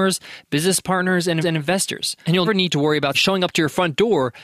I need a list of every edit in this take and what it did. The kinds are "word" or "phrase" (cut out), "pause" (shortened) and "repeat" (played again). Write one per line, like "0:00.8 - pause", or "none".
0:01.4 - repeat
0:02.4 - word
0:03.1 - word